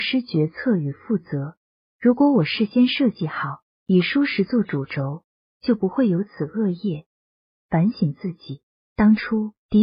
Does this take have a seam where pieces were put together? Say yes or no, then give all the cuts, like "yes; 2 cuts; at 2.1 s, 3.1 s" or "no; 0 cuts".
no; 0 cuts